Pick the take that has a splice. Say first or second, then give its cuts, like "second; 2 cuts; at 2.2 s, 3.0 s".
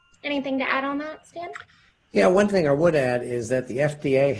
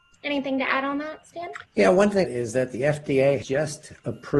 second; 3 cuts; at 1.7 s, 2.2 s, 3.4 s